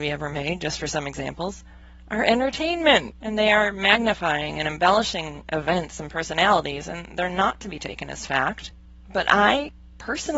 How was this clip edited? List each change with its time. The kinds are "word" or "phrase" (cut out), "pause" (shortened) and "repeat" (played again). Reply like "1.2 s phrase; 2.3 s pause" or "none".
none